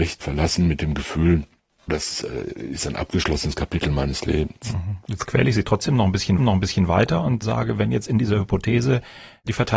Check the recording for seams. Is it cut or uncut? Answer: cut